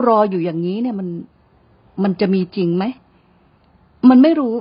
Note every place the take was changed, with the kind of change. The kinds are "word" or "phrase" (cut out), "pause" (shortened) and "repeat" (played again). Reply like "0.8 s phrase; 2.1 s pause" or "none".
none